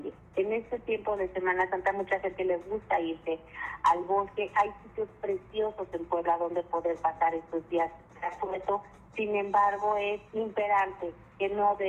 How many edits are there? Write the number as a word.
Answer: two